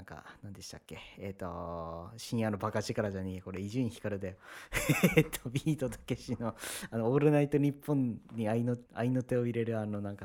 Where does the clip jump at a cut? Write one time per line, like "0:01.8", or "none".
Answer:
0:08.9